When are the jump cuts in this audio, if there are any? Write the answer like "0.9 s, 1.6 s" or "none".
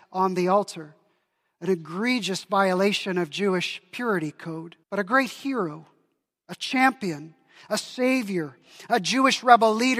4.8 s